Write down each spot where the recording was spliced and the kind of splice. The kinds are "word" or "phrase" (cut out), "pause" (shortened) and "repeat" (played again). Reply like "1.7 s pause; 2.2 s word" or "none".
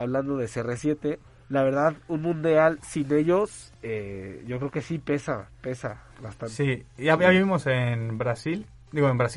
1.3 s pause; 3.7 s pause; 6.1 s pause